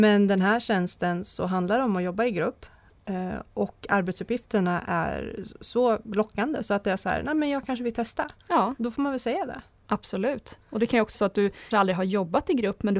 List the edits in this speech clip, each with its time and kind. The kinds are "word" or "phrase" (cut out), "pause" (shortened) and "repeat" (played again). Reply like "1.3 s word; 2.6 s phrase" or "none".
8.4 s pause; 11.1 s word; 11.7 s word